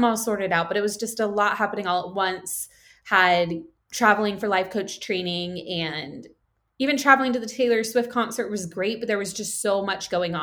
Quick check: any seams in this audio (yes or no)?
no